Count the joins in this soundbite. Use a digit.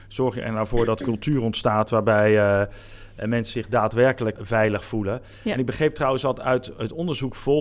2